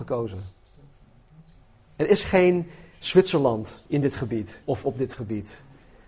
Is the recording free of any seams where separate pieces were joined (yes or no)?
no